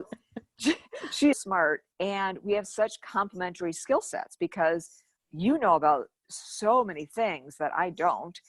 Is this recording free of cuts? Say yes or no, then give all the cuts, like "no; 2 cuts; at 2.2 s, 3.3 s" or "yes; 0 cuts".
no; 3 cuts; at 1.3 s, 1.9 s, 5.2 s